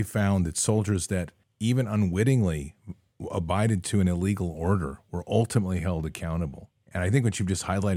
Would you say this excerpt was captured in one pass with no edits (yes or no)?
no